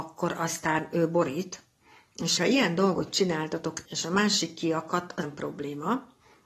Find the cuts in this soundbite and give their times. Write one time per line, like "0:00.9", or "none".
0:02.4
0:03.9
0:05.2